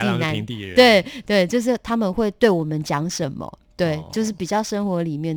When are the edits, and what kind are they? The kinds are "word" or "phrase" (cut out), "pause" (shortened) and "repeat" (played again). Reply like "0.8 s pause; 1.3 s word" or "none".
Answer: none